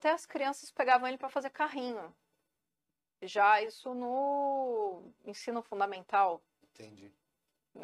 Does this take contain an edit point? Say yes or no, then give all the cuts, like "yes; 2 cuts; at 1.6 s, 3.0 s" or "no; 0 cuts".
no; 0 cuts